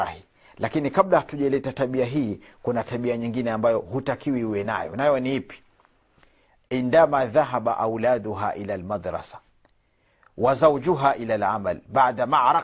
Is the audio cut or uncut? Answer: uncut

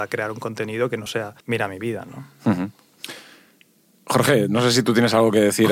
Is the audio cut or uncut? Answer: cut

